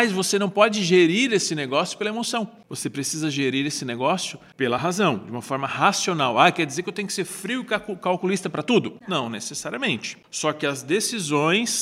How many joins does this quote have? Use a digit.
0